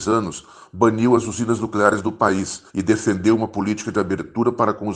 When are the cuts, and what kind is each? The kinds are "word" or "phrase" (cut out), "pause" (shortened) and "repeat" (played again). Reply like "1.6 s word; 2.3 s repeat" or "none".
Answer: 2.7 s pause

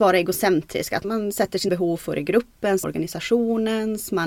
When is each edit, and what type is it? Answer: 1.0 s word; 1.7 s word; 2.8 s word

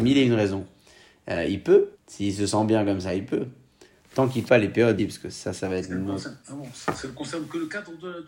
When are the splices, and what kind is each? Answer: 1.9 s pause; 4.5 s word; 5.0 s phrase

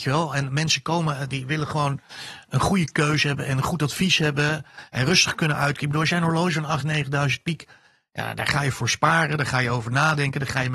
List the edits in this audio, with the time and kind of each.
none

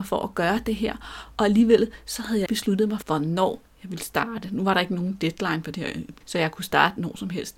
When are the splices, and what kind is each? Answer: 2.5 s word; 3.0 s word; 6.2 s word

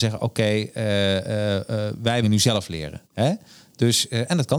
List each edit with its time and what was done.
2.2 s phrase; 3.0 s pause

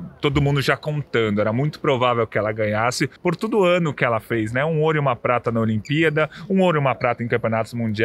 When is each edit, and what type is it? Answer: 3.2 s pause

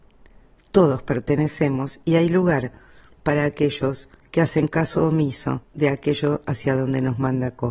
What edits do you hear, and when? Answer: 5.6 s pause

